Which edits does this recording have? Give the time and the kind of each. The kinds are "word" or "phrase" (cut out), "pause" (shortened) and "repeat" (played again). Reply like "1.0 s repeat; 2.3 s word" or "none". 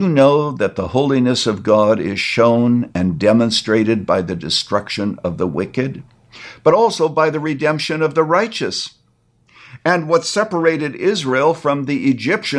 none